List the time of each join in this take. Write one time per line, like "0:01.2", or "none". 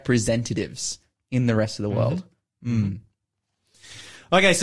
none